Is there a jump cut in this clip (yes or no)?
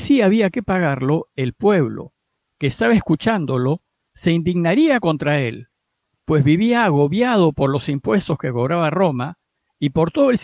no